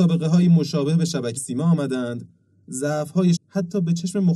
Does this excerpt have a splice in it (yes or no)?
yes